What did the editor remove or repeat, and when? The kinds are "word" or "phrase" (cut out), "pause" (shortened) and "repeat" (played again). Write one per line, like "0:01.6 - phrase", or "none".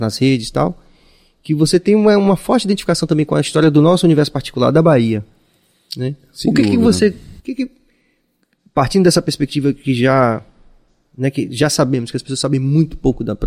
0:07.4 - pause